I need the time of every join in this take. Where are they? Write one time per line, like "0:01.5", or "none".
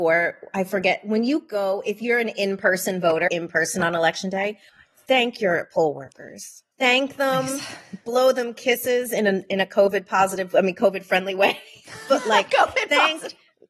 0:03.3
0:04.7
0:06.7